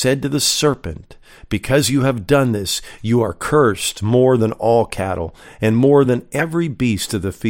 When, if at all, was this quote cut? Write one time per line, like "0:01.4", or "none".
none